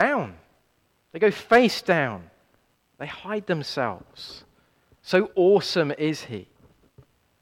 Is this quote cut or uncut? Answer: uncut